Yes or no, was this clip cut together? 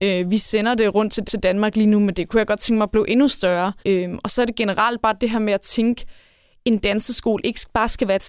yes